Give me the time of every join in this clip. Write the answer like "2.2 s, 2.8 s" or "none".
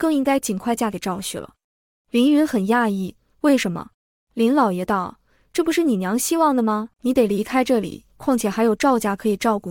3.9 s, 6.9 s, 8.1 s